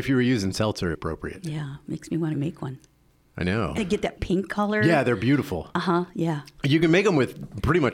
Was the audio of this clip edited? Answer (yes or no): yes